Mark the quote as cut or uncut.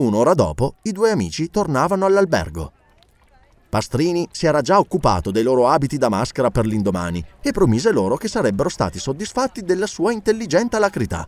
uncut